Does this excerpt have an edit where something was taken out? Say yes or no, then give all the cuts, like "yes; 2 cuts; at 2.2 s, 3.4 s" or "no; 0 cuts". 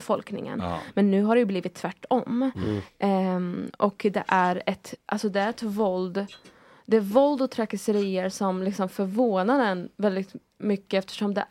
no; 0 cuts